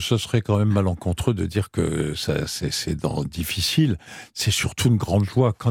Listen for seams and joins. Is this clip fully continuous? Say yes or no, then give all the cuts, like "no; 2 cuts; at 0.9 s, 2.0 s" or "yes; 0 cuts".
yes; 0 cuts